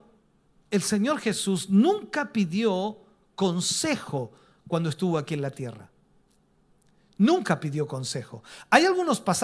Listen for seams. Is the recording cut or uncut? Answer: uncut